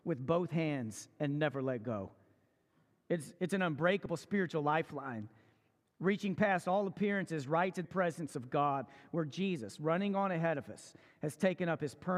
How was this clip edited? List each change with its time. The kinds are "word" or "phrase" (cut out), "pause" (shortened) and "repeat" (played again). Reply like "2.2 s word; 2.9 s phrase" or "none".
7.8 s word